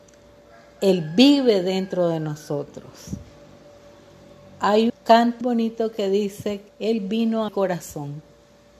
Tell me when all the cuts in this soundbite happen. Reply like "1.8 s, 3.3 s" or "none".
4.9 s, 5.4 s, 6.7 s, 7.5 s